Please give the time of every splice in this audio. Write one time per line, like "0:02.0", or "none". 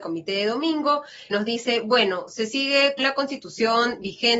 0:01.3
0:03.0